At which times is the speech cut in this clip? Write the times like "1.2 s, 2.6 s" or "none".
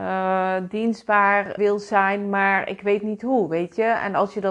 1.6 s